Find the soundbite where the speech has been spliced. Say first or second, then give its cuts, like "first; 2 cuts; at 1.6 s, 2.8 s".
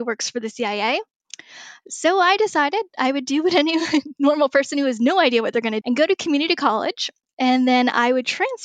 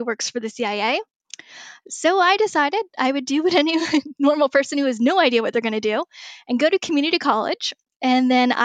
first; 1 cut; at 5.8 s